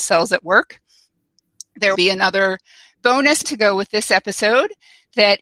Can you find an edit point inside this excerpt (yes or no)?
yes